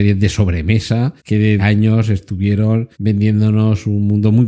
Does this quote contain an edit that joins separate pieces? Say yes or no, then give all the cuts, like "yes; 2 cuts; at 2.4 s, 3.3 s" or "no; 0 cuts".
yes; 3 cuts; at 1.2 s, 1.6 s, 2.9 s